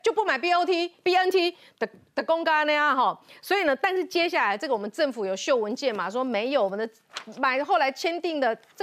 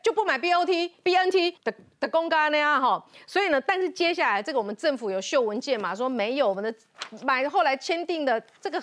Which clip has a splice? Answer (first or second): second